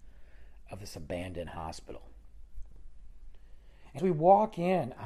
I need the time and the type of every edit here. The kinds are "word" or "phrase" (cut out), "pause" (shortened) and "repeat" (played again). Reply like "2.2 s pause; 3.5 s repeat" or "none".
4.0 s word